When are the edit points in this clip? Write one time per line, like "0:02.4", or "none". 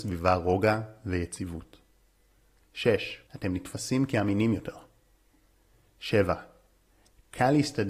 0:03.3

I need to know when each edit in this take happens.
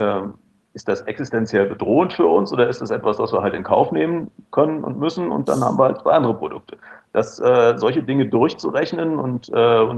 none

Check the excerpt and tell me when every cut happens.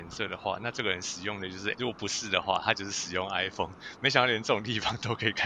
0:01.7

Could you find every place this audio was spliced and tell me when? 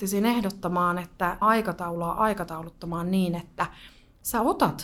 0:01.4

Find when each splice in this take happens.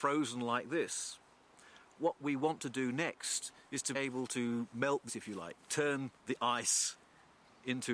0:03.9
0:05.1

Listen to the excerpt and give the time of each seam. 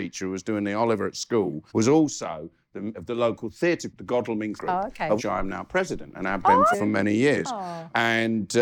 0:01.7
0:02.9
0:03.9
0:04.6
0:05.2
0:06.7

